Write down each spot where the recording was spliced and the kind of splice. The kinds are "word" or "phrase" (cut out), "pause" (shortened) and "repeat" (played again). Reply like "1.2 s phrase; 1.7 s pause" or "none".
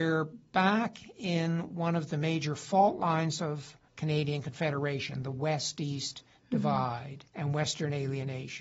3.9 s pause; 7.3 s pause